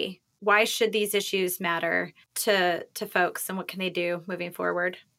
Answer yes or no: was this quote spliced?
yes